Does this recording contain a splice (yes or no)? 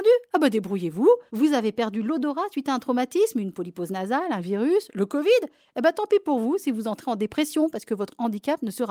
yes